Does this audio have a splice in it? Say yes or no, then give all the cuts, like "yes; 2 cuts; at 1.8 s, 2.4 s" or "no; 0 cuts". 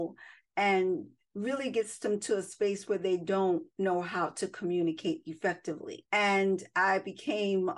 no; 0 cuts